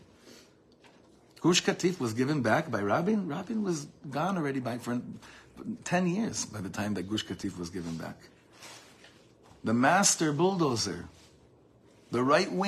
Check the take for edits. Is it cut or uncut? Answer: uncut